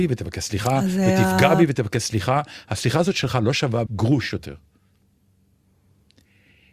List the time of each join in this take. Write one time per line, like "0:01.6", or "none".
0:03.9